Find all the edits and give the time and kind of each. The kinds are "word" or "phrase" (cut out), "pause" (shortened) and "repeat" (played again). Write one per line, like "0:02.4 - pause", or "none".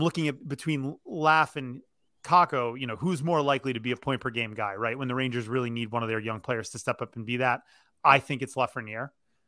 none